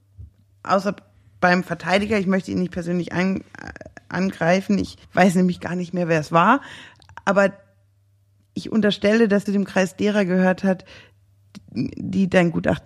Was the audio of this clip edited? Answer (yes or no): yes